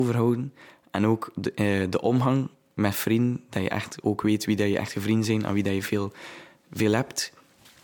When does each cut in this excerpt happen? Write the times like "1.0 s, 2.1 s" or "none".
none